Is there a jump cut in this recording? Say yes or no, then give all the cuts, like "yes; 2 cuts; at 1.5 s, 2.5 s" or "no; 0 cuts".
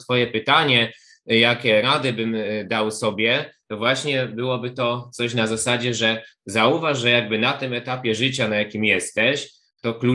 no; 0 cuts